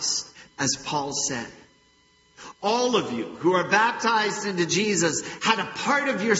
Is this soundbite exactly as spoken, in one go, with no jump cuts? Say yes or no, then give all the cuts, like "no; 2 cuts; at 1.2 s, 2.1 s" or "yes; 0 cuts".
yes; 0 cuts